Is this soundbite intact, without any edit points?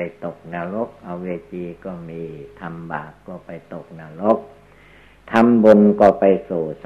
yes; 0 cuts

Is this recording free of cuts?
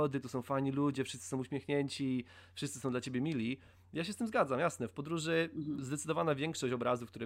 yes; 0 cuts

